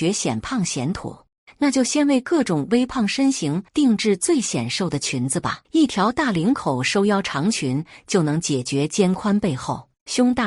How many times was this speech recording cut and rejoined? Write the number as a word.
two